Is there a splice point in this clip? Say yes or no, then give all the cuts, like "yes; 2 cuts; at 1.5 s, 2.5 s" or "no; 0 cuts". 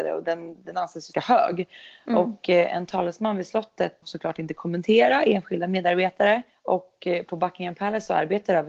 yes; 3 cuts; at 1.1 s, 4.0 s, 6.5 s